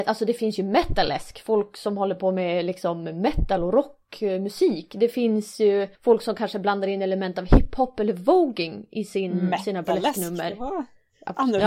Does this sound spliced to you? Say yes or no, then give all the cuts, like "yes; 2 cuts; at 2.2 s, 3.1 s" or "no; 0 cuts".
yes; 1 cut; at 5.9 s